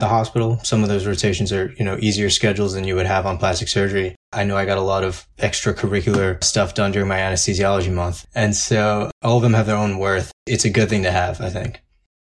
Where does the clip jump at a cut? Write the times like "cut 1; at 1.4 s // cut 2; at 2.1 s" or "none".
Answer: cut 1; at 4.2 s // cut 2; at 5.3 s // cut 3; at 9.1 s